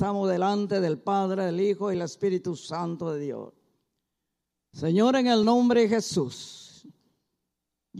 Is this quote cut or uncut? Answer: uncut